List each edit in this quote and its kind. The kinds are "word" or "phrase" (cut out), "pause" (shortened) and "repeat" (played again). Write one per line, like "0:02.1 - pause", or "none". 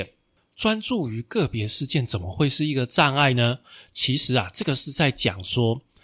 none